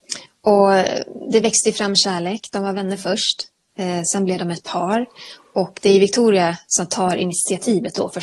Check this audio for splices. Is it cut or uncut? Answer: uncut